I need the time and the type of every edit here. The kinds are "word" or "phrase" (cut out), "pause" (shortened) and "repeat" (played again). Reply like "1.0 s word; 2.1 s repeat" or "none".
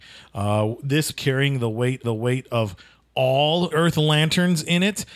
1.1 s phrase; 2.0 s repeat; 3.7 s word